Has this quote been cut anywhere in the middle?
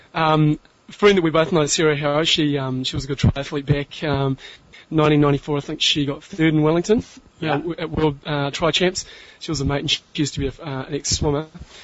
no; 0 cuts

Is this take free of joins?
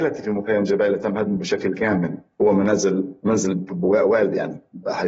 yes; 0 cuts

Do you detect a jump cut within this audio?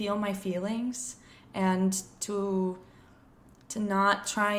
no; 0 cuts

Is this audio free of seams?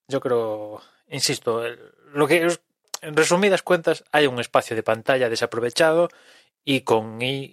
yes; 0 cuts

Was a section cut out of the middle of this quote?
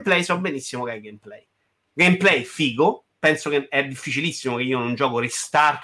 no; 0 cuts

